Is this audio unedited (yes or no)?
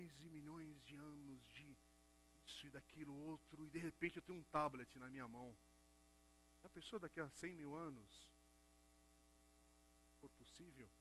yes